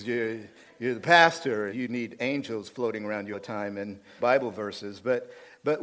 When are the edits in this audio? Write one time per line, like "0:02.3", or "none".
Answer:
0:01.7
0:03.3
0:04.2